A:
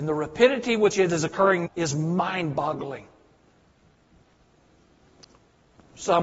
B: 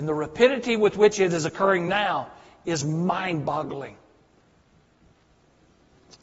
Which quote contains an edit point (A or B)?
A